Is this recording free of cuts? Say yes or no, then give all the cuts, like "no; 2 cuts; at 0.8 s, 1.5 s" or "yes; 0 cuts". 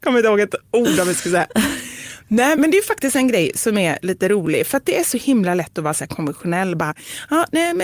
no; 1 cut; at 2.5 s